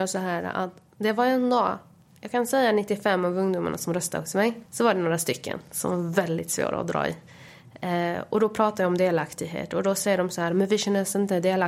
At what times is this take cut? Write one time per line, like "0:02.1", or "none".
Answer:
0:04.7